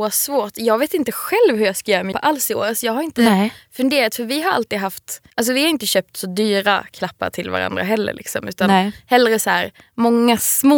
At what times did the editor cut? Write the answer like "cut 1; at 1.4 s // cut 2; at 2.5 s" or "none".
cut 1; at 2.1 s // cut 2; at 5.3 s